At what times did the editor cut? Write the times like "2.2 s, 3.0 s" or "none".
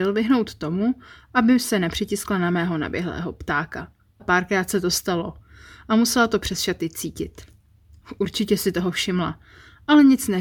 4.2 s